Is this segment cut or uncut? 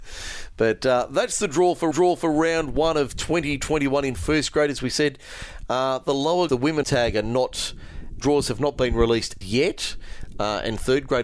cut